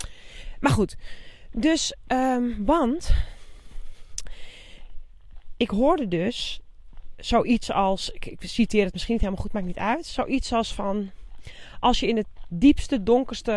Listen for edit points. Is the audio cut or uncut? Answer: uncut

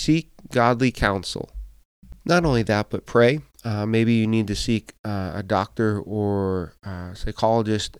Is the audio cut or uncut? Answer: cut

